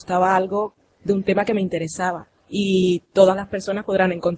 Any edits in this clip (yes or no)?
no